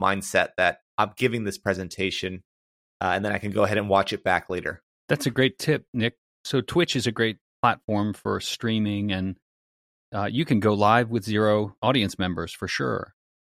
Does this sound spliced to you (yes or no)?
no